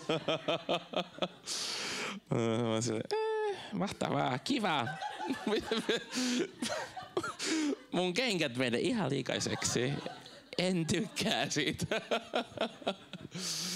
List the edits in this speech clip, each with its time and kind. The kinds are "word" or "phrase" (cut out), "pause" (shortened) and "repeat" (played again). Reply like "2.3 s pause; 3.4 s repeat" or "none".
none